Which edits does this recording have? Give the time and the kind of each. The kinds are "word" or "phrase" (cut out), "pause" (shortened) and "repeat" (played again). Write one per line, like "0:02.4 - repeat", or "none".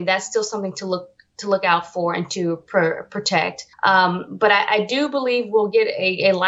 0:03.7 - pause